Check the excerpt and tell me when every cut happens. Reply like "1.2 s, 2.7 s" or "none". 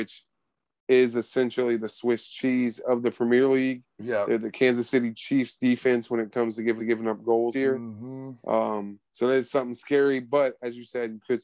6.8 s, 7.5 s, 9.1 s